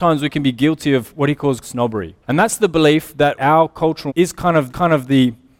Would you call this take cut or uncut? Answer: cut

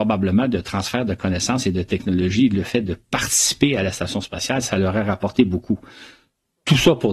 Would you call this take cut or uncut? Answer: uncut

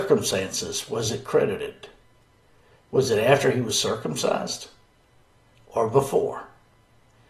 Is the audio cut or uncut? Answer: uncut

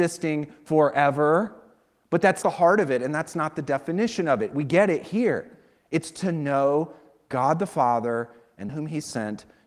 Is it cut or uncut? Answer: cut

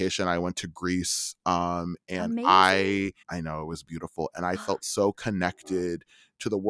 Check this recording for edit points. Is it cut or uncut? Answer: cut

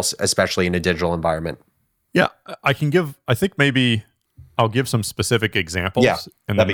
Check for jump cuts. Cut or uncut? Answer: uncut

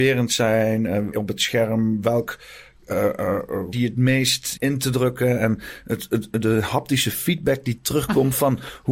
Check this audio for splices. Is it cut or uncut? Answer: cut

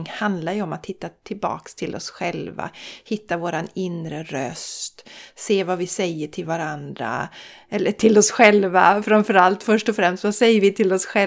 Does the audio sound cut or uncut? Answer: uncut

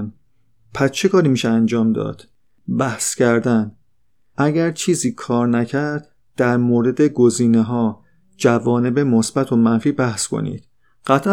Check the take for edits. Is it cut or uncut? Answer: uncut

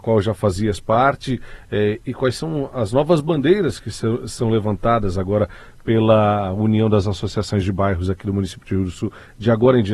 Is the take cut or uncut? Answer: uncut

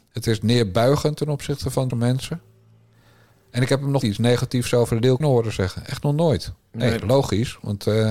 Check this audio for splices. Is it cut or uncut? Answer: cut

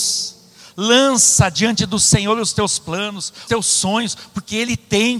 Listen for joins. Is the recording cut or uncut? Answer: cut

